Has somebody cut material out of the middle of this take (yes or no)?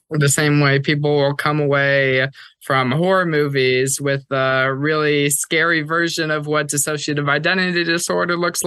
no